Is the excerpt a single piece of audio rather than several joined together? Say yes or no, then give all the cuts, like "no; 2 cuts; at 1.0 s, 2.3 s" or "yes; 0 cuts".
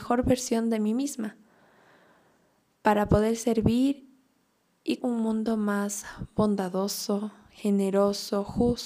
no; 1 cut; at 5.0 s